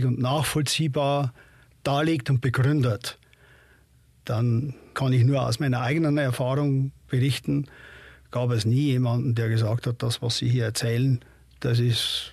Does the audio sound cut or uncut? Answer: uncut